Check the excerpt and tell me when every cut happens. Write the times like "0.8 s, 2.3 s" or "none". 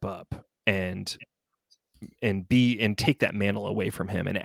none